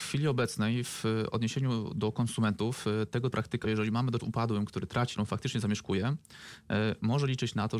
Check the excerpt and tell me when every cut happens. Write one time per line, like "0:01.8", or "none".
0:03.3
0:03.6
0:04.2
0:05.1